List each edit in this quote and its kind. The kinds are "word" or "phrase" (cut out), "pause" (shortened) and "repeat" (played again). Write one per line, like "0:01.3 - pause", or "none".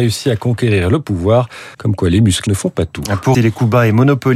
0:01.7 - pause
0:02.5 - phrase
0:03.3 - word

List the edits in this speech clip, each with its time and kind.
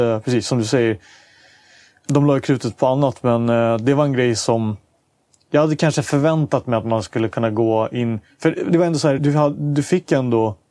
0:09.2 - word

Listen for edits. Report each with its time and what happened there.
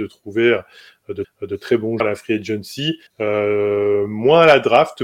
0:01.2 - repeat
0:02.0 - word
0:03.1 - pause

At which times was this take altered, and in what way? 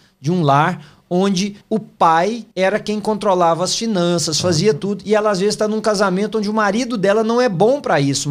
0:01.6 - pause
0:02.5 - pause

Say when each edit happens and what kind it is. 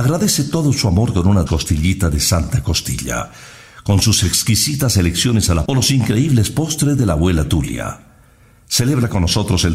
0:01.5 - word
0:05.7 - word

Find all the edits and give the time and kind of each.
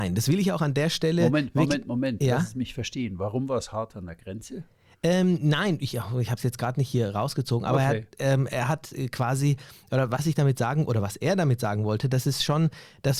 none

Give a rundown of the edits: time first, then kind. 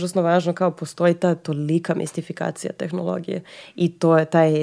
none

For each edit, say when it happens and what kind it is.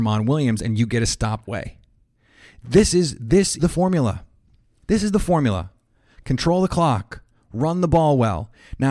0:01.4 - word
0:03.6 - word

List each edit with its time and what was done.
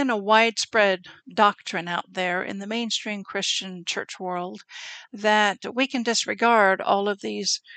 0:01.2 - pause

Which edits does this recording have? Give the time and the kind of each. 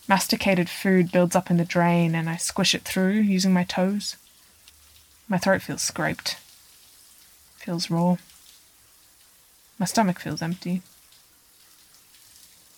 0:04.7 - pause

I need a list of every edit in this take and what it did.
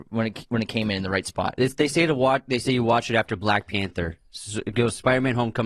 none

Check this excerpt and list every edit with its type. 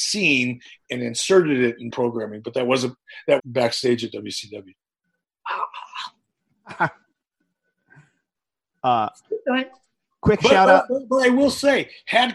0:01.9 - word
0:03.4 - word

